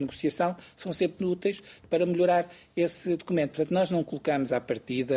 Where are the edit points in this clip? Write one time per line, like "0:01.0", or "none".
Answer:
0:01.2